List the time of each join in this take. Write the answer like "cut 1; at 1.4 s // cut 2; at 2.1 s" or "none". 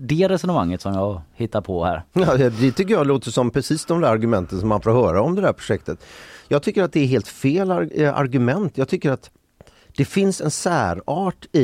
none